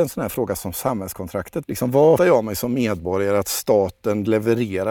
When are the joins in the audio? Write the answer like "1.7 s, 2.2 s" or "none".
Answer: 1.6 s, 2.2 s

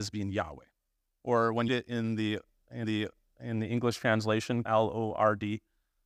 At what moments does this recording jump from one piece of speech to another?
1.7 s, 2.8 s, 4.6 s

